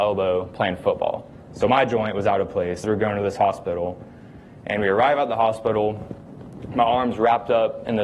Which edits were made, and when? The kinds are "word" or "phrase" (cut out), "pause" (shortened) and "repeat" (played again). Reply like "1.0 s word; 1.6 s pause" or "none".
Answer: 2.8 s word